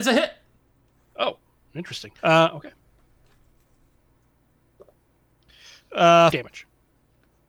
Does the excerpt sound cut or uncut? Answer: cut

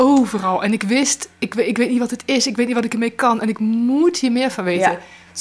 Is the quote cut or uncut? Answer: uncut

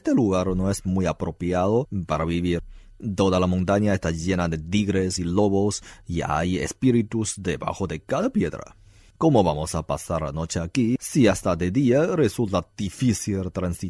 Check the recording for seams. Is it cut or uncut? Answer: uncut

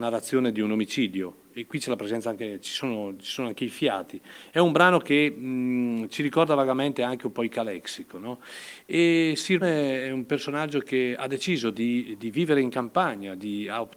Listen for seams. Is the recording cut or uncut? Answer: cut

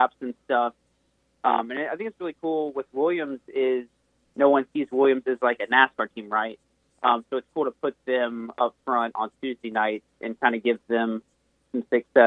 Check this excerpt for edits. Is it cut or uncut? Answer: uncut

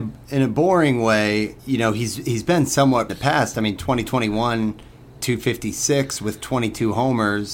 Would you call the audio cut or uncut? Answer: cut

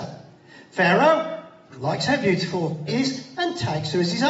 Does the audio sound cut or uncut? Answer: cut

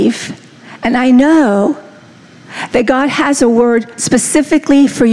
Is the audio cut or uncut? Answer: uncut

